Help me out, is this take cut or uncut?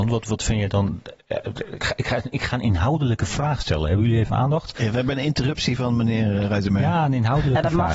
uncut